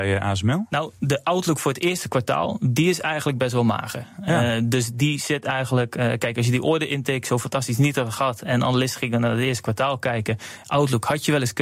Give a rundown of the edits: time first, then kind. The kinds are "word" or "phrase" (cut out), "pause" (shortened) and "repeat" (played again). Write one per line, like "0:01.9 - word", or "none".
none